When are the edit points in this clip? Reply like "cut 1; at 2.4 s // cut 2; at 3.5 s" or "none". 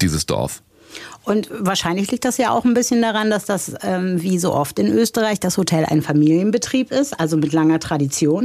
none